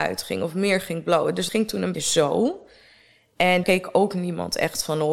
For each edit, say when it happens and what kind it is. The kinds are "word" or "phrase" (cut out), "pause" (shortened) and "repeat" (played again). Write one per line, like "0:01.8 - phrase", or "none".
0:01.5 - word
0:01.9 - word
0:03.6 - word